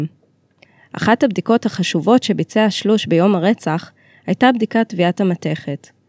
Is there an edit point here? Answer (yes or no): no